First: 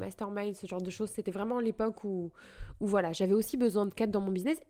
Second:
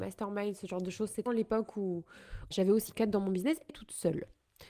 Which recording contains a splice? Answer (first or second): second